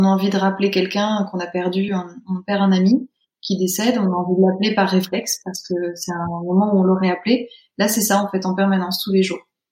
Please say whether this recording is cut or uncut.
uncut